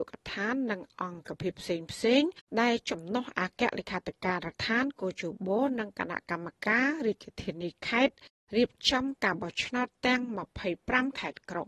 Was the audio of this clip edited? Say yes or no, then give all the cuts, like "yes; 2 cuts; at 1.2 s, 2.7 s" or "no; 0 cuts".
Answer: yes; 1 cut; at 2.5 s